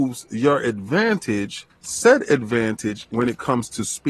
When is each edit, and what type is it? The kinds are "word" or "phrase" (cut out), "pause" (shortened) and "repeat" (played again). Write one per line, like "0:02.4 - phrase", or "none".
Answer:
0:01.7 - phrase